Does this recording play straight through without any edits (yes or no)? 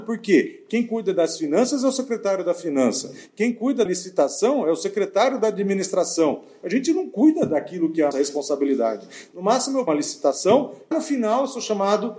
no